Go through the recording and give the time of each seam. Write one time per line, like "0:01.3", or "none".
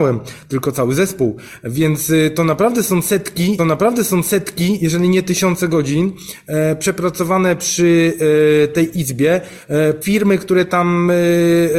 0:03.6
0:10.0